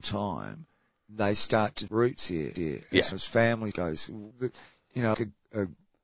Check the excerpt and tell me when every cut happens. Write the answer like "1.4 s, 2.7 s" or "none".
1.9 s, 2.6 s, 3.1 s, 3.7 s, 4.3 s, 5.1 s